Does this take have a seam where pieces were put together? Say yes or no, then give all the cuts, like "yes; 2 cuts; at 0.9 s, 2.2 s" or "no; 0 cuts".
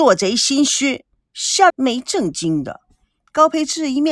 yes; 1 cut; at 1.7 s